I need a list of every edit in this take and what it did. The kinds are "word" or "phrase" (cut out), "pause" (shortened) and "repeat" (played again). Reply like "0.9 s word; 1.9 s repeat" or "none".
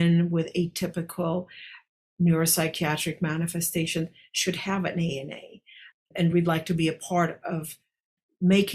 none